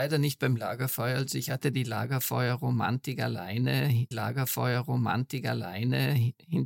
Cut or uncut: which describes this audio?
cut